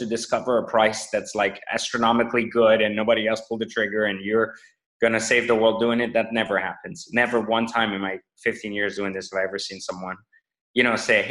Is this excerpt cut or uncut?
uncut